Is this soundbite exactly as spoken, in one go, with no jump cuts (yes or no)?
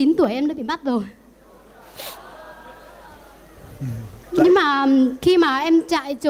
no